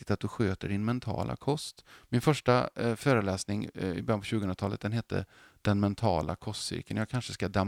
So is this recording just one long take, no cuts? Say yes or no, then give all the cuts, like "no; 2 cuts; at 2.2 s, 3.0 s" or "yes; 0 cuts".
yes; 0 cuts